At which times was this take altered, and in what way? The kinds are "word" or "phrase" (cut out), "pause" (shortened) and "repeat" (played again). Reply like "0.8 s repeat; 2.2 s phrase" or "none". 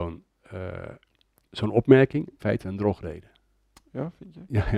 2.4 s phrase